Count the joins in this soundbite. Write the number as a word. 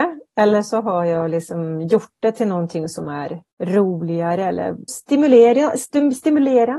two